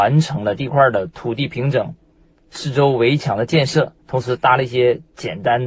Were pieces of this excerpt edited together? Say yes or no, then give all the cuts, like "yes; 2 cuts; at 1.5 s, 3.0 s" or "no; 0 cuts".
yes; 1 cut; at 4.0 s